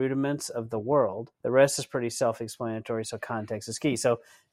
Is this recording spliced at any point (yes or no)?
yes